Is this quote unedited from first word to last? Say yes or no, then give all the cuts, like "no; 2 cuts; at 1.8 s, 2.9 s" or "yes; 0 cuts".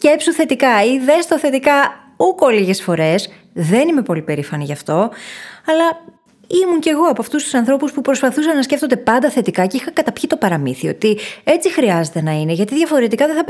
yes; 0 cuts